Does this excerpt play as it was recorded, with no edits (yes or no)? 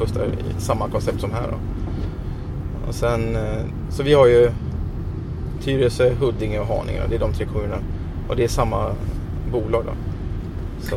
yes